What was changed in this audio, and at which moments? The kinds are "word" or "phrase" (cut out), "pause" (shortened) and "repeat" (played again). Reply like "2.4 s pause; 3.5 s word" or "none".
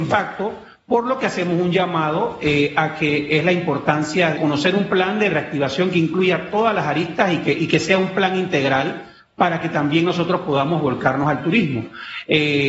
4.3 s phrase

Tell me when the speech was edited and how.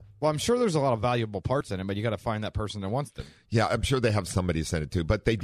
none

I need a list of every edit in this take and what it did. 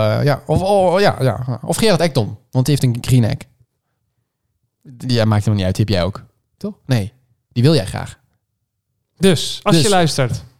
none

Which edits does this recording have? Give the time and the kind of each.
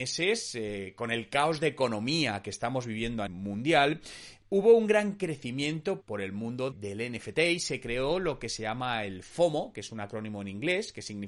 3.3 s word; 6.0 s word; 6.7 s word

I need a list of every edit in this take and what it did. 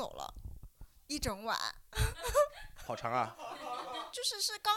2.9 s word

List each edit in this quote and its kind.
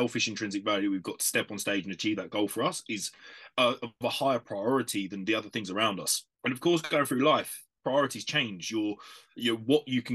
6.3 s pause

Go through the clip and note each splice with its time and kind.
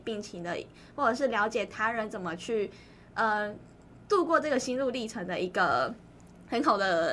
none

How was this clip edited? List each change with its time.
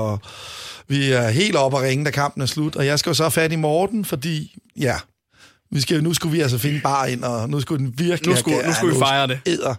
4.7 s pause

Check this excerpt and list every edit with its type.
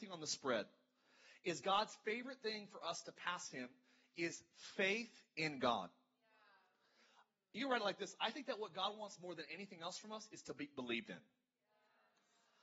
none

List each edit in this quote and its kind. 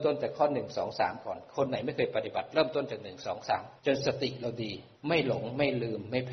3.8 s pause; 5.0 s pause

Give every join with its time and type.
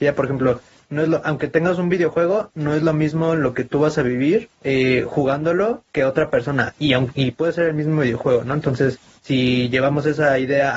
4.5 s pause; 5.9 s pause; 9.1 s pause

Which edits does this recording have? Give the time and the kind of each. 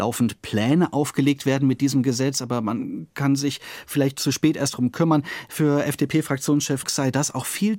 6.8 s phrase

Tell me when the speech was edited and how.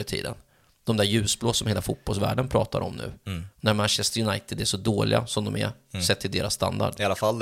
3.5 s pause

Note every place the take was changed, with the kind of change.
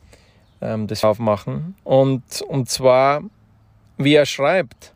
1.0 s word; 1.8 s pause

